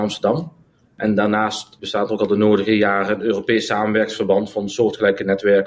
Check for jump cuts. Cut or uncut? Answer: uncut